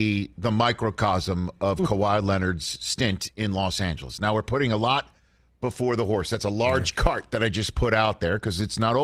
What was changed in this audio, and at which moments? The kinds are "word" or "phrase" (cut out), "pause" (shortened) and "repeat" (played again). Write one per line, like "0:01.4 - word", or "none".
none